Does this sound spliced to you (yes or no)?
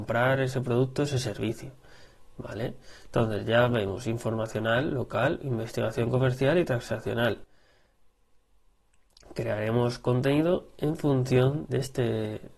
yes